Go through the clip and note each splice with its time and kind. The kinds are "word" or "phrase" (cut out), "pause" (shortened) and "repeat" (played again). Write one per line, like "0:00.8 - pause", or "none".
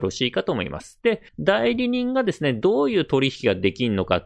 0:01.3 - pause